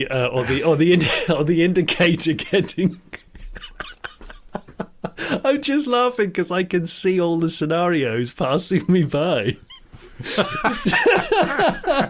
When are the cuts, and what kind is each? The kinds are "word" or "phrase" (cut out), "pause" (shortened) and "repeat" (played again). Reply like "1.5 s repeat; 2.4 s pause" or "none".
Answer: none